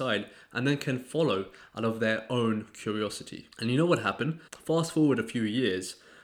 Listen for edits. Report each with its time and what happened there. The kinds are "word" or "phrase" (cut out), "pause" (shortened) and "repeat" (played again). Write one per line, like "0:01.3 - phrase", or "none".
0:03.5 - pause
0:04.5 - pause